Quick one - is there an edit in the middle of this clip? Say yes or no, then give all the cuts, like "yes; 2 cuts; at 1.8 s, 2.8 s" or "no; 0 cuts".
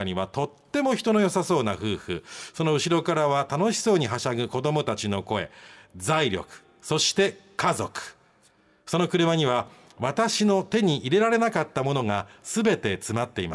no; 0 cuts